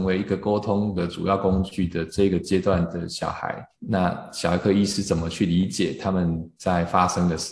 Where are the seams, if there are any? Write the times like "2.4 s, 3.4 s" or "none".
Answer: 3.7 s